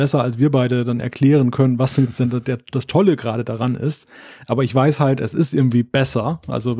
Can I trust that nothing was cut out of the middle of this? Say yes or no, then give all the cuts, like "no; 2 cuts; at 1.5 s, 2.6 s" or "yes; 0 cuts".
yes; 0 cuts